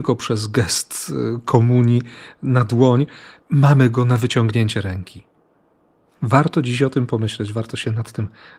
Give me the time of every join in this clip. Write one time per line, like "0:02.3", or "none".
none